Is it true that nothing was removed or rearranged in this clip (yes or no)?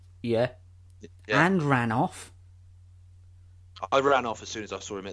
yes